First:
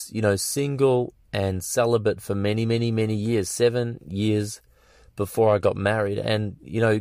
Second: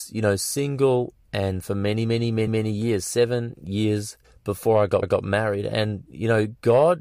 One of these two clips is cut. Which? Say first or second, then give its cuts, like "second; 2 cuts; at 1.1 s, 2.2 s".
second; 4 cuts; at 1.6 s, 2.5 s, 4.2 s, 5.0 s